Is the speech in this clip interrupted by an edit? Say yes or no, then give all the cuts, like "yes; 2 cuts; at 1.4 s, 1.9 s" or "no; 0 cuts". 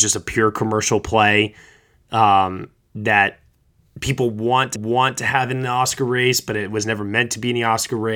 yes; 1 cut; at 4.8 s